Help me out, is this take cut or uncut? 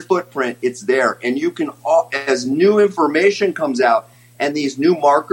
uncut